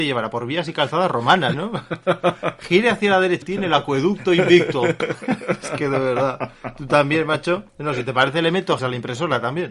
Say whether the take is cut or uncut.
cut